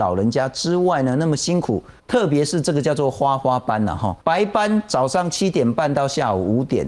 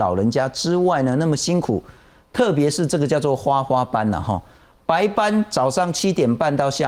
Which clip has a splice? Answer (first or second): first